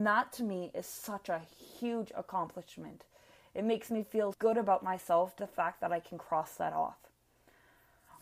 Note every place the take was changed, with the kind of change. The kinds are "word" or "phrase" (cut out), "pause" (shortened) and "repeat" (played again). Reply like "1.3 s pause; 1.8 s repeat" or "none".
4.3 s word; 5.4 s word